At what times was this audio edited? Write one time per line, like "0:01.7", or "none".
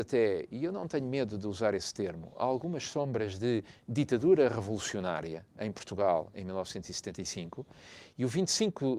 none